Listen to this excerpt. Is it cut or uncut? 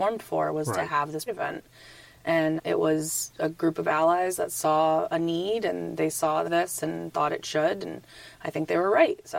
cut